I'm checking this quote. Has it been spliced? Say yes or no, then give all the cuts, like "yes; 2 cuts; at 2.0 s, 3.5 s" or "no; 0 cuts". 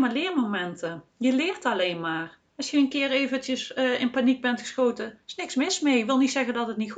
yes; 2 cuts; at 2.5 s, 5.2 s